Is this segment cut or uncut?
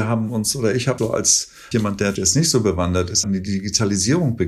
cut